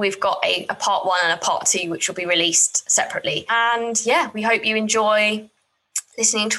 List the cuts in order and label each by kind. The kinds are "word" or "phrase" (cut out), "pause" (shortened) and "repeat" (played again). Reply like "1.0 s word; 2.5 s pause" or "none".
none

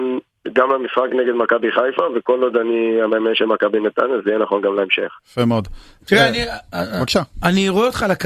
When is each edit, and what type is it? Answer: 5.2 s pause

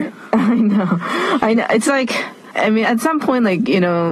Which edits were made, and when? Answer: 2.8 s word

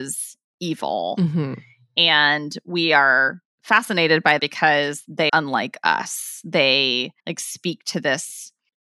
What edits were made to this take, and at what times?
4.4 s phrase; 5.3 s word; 7.2 s pause

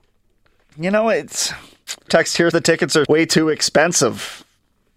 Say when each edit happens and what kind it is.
2.1 s word; 2.5 s word; 3.1 s word

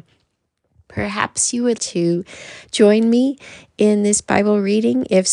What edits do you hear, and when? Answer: 1.8 s word

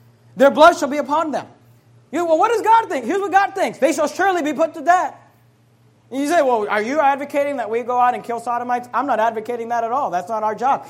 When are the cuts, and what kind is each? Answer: none

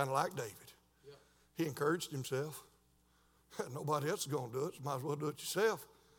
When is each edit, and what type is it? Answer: none

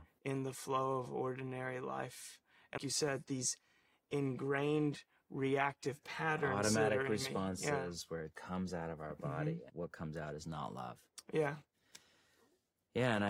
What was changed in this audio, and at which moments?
2.8 s word; 8.3 s word; 9.7 s word

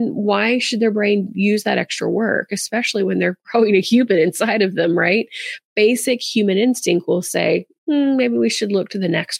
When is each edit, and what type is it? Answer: none

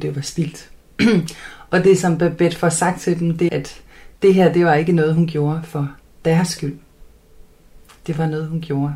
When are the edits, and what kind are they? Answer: 3.5 s word

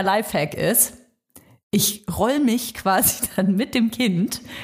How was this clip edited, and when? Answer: none

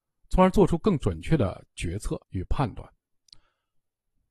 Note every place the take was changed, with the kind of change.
2.2 s pause

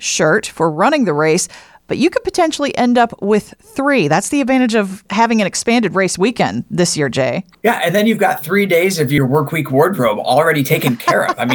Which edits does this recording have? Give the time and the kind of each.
none

